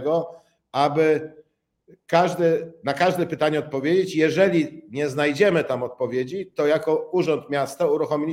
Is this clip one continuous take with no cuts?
yes; 0 cuts

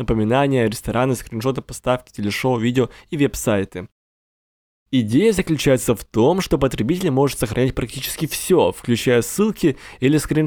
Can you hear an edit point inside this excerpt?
no; 0 cuts

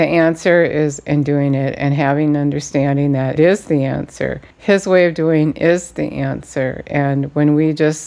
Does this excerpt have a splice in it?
yes; 2 cuts; at 3.4 s, 4.5 s

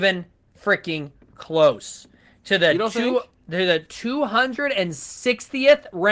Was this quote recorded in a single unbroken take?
yes; 0 cuts

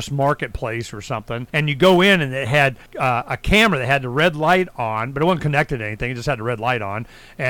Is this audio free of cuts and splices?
no; 2 cuts; at 1.5 s, 2.9 s

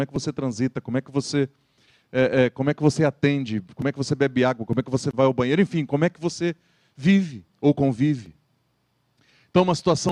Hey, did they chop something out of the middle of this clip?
yes; 1 cut; at 7.5 s

